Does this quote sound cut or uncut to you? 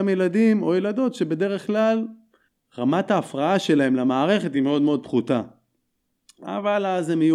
uncut